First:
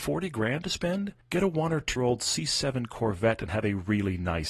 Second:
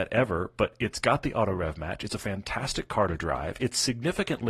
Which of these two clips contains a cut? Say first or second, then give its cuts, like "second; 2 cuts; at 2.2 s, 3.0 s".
first; 2 cuts; at 1.2 s, 2.0 s